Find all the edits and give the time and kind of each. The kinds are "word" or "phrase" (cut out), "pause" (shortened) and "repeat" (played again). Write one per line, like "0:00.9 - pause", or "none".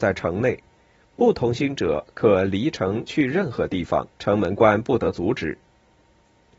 0:04.1 - pause